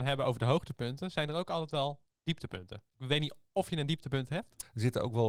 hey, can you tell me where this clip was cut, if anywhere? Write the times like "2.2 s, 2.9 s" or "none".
2.9 s